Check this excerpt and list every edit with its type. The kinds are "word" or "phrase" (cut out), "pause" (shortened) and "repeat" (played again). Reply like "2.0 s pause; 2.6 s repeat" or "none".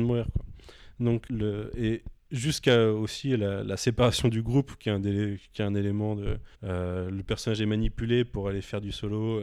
1.3 s word; 6.5 s pause